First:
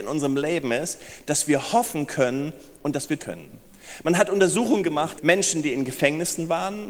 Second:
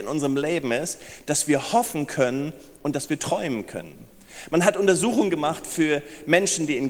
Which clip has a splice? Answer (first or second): first